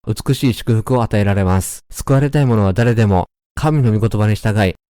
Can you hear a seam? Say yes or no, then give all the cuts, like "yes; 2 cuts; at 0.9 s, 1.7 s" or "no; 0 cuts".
yes; 1 cut; at 1.8 s